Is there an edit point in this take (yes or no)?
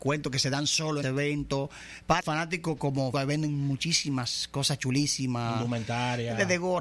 yes